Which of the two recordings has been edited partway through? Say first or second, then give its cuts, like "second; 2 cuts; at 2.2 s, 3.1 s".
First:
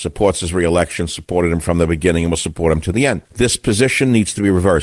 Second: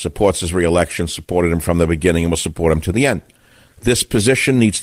first; 1 cut; at 3.3 s